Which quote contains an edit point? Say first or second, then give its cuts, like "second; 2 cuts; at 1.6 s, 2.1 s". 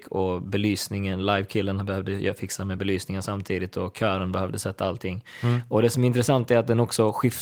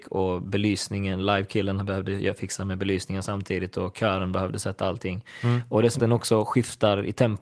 second; 1 cut; at 6.0 s